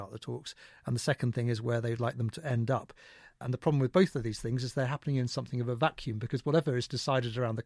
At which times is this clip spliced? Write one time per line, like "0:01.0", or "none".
none